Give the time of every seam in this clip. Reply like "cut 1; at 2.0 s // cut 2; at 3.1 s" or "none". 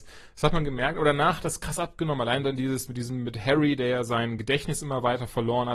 none